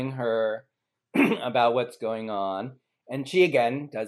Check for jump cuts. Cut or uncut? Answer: uncut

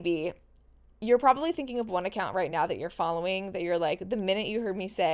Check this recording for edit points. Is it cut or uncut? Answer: uncut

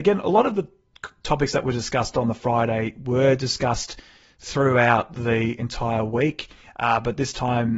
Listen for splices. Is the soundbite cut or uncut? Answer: uncut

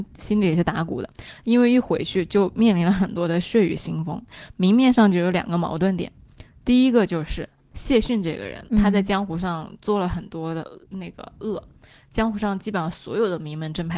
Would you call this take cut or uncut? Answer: cut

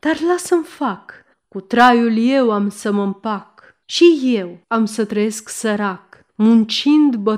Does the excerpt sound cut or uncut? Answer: cut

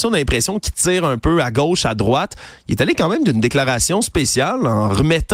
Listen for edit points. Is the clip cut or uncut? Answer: uncut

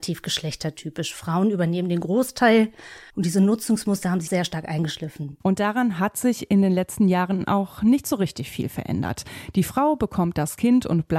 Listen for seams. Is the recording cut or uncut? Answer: cut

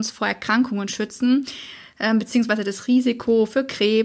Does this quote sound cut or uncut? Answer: uncut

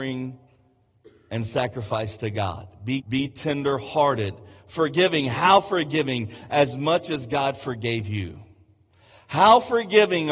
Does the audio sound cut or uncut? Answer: cut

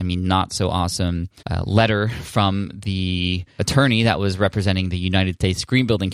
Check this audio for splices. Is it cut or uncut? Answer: cut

